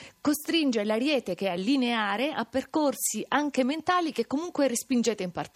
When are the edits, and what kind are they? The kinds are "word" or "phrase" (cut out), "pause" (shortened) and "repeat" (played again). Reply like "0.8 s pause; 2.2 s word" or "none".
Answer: none